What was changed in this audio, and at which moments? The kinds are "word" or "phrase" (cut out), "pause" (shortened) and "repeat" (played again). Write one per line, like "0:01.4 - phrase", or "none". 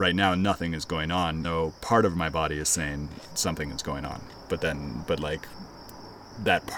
0:01.4 - word